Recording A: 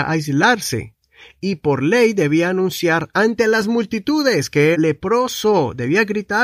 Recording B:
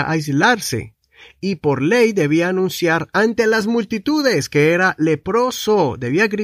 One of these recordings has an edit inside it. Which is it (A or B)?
A